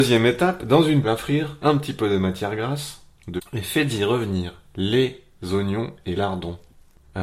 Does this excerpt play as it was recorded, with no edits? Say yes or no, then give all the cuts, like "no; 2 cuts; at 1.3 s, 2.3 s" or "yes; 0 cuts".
no; 4 cuts; at 1.0 s, 1.6 s, 3.4 s, 6.2 s